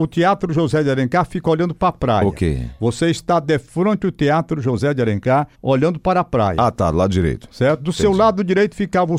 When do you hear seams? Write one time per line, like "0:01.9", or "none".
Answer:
0:05.5